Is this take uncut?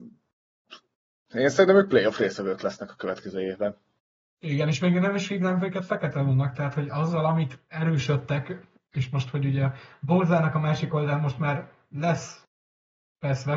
yes; 0 cuts

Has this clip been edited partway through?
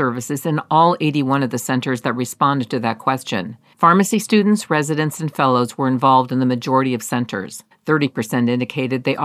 yes; 2 cuts; at 3.7 s, 7.7 s

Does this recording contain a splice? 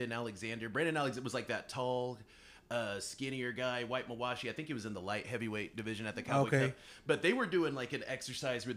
no; 0 cuts

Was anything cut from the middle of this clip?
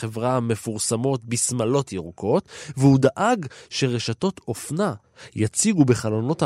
no; 0 cuts

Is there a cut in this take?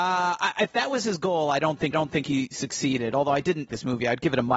yes; 2 cuts; at 1.9 s, 3.7 s

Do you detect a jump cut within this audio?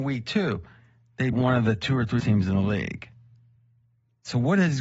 yes; 2 cuts; at 1.3 s, 2.2 s

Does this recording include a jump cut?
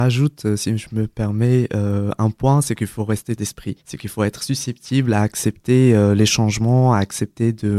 yes; 2 cuts; at 3.4 s, 3.8 s

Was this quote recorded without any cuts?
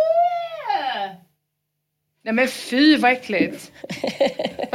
yes; 0 cuts

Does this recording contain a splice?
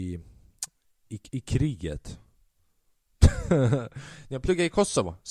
no; 0 cuts

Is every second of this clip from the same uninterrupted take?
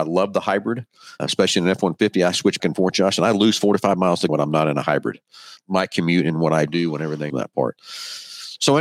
no; 5 cuts; at 1.2 s, 2.6 s, 4.3 s, 5.6 s, 7.3 s

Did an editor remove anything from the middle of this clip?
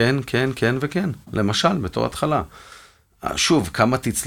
yes; 1 cut; at 1.2 s

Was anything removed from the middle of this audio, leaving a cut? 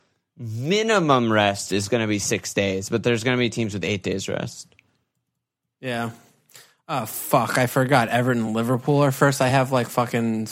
no; 0 cuts

